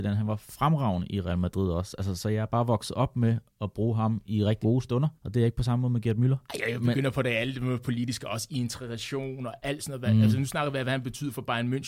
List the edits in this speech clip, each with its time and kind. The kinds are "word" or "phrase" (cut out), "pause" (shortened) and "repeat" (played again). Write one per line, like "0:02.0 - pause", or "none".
0:04.6 - word
0:05.2 - pause
0:06.4 - pause